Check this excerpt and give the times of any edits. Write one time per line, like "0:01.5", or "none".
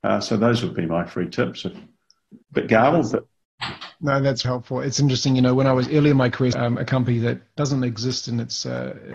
0:02.4
0:04.4
0:06.5